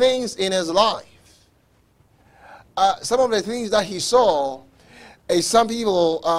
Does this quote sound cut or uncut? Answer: uncut